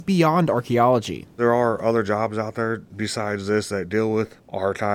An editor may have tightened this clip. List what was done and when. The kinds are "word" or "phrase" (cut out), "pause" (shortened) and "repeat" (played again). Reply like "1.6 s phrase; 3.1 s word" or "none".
none